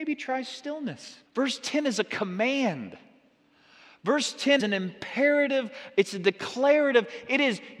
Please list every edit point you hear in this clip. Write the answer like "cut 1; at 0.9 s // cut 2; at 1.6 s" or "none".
cut 1; at 1.3 s // cut 2; at 4.6 s